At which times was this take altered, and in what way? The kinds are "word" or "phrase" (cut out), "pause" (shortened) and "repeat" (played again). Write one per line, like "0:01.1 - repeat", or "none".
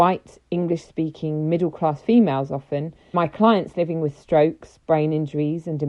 0:03.1 - word